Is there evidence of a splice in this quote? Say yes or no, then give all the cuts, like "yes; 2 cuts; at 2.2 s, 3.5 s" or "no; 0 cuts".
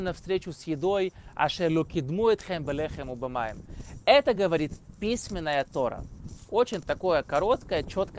no; 0 cuts